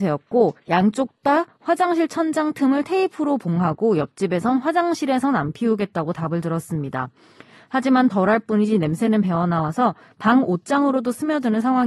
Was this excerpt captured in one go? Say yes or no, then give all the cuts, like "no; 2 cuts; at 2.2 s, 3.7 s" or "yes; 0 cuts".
yes; 0 cuts